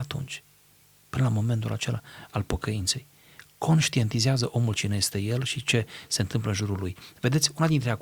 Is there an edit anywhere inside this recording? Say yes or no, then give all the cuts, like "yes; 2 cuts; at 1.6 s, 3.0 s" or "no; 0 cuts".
no; 0 cuts